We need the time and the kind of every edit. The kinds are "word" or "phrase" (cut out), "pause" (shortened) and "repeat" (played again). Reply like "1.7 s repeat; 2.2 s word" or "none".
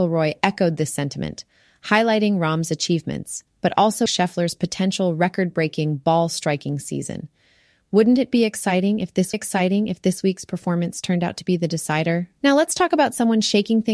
4.1 s word; 9.3 s repeat; 12.4 s pause